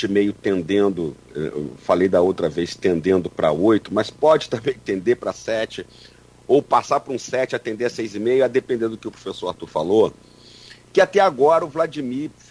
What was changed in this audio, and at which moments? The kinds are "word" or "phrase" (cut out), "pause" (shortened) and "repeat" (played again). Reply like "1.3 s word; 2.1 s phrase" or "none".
none